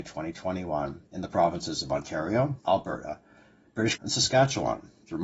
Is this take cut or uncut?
cut